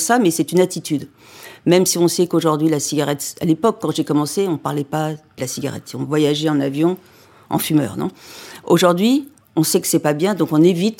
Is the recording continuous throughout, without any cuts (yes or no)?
no